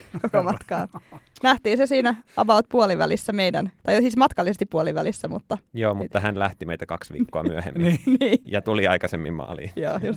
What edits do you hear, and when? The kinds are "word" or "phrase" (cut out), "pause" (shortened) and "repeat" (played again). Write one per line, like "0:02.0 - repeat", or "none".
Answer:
0:03.8 - pause